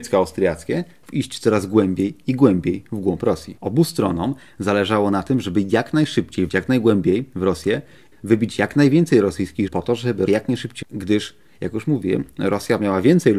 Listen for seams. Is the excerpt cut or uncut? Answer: cut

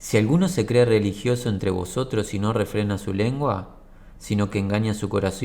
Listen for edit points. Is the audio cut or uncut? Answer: uncut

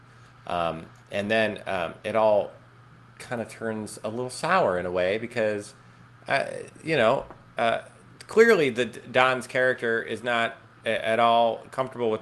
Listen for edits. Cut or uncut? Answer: uncut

